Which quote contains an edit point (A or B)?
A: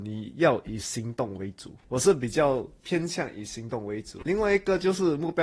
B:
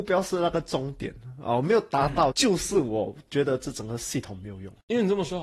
B